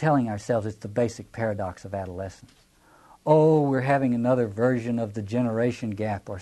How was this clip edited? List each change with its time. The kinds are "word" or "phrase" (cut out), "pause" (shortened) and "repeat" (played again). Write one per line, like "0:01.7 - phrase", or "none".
none